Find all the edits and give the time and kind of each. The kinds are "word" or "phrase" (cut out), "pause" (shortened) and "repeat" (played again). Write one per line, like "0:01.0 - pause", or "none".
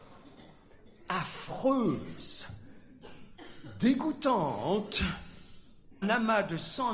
0:06.0 - word